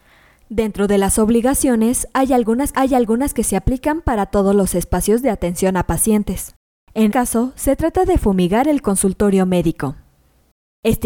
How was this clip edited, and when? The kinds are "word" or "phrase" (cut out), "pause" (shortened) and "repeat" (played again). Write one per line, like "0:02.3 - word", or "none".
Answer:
0:02.7 - repeat
0:07.1 - word